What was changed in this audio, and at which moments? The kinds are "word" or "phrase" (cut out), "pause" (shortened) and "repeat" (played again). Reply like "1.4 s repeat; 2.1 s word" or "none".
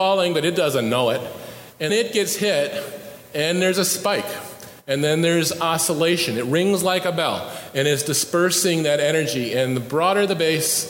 1.9 s word